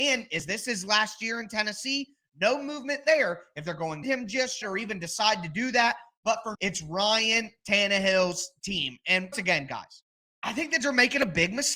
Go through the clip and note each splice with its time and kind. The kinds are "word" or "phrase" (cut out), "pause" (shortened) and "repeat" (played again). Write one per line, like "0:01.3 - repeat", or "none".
0:04.0 - phrase
0:04.6 - word
0:06.5 - word
0:09.3 - word
0:10.1 - pause
0:10.8 - word